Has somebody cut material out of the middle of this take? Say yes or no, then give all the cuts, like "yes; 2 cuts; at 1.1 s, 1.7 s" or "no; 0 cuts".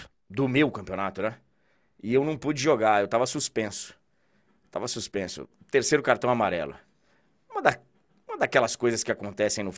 no; 0 cuts